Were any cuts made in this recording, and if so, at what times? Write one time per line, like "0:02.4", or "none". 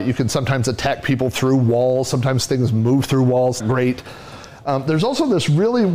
0:03.6